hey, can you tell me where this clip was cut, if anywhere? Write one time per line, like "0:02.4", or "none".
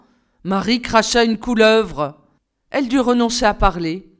0:02.4